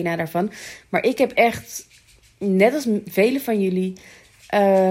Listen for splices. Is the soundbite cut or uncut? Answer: uncut